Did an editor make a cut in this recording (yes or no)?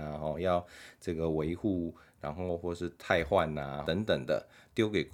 yes